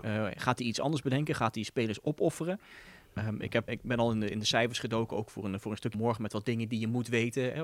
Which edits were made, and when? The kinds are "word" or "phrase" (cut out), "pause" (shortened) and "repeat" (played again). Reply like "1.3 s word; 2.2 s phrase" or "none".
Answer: 3.7 s word; 5.9 s word